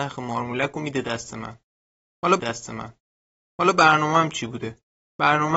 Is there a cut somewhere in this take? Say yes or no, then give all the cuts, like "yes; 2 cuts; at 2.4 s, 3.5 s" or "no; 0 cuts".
yes; 1 cut; at 2.4 s